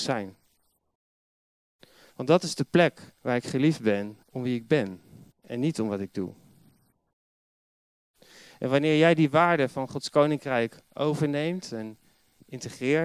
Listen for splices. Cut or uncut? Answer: cut